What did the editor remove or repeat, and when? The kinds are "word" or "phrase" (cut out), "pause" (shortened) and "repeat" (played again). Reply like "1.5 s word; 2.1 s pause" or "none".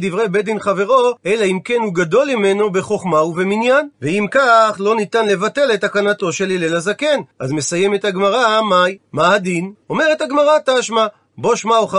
1.2 s pause; 3.9 s pause; 7.3 s pause; 9.1 s pause; 9.8 s pause